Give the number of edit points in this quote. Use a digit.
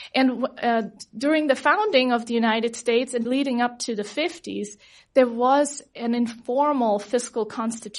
1